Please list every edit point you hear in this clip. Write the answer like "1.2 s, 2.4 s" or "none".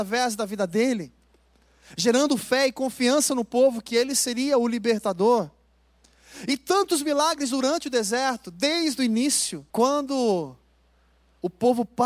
9.7 s